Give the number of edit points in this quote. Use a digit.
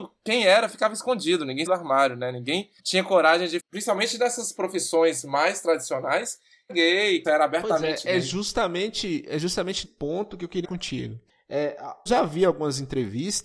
8